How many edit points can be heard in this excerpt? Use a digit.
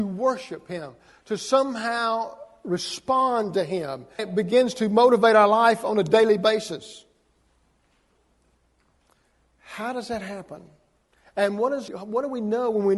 2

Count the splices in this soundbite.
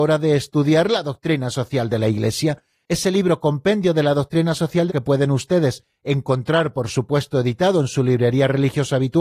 2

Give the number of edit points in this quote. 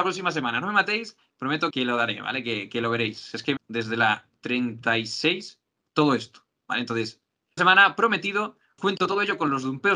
4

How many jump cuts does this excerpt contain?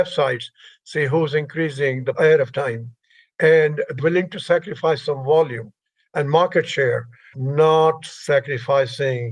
3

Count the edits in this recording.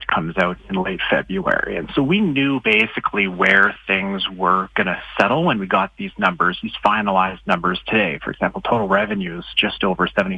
0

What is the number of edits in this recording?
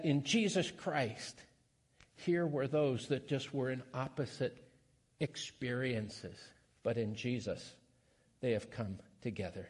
0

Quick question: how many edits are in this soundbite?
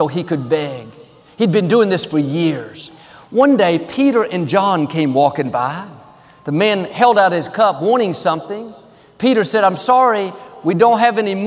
0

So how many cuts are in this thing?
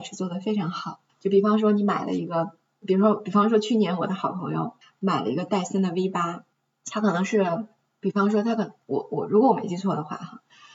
3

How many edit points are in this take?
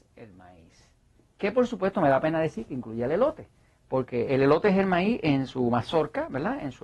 0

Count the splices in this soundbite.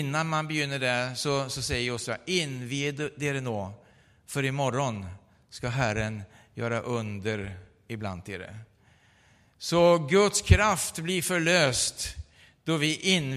0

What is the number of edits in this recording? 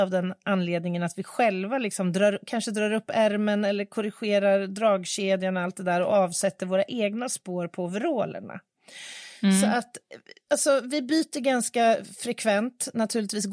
0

